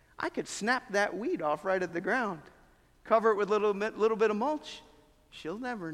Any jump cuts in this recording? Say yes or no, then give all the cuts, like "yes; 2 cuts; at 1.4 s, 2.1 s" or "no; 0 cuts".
no; 0 cuts